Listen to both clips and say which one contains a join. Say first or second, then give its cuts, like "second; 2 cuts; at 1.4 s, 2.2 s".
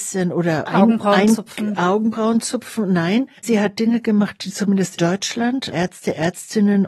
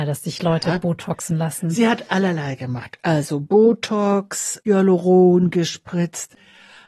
first; 3 cuts; at 3.4 s, 5.0 s, 5.7 s